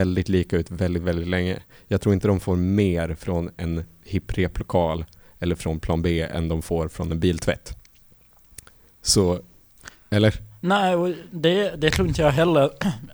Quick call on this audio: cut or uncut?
uncut